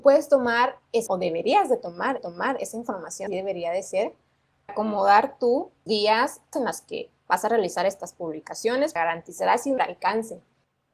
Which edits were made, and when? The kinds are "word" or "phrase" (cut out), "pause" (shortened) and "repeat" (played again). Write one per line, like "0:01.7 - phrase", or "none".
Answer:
0:01.1 - word
0:02.2 - repeat
0:03.3 - word
0:04.7 - word
0:05.9 - word
0:06.5 - phrase
0:09.0 - word
0:09.8 - word

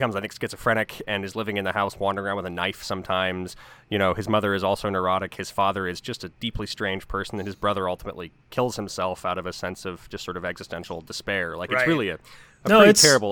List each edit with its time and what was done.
none

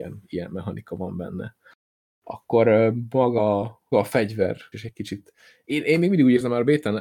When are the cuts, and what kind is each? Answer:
0:03.9 - word
0:04.7 - word

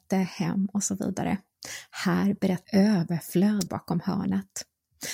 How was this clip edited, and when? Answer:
0:02.7 - phrase
0:03.7 - word

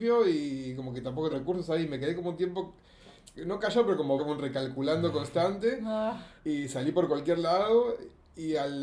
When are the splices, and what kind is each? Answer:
0:01.3 - phrase
0:03.3 - pause
0:04.2 - phrase
0:06.4 - pause

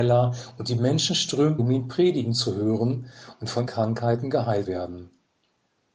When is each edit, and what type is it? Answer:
0:01.6 - word
0:03.7 - word
0:04.6 - word

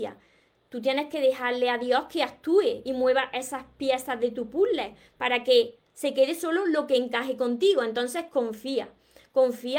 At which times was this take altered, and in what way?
none

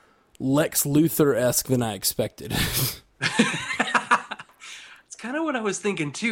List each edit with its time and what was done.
none

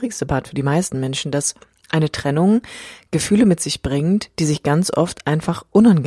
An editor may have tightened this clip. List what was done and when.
none

